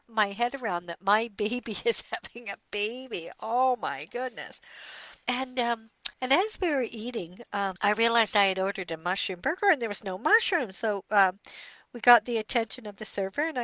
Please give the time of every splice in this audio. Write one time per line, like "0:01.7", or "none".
0:05.2
0:06.1